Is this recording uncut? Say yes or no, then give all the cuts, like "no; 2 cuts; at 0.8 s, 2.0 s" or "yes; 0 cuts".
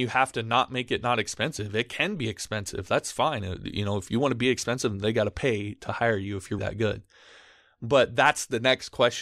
no; 1 cut; at 6.6 s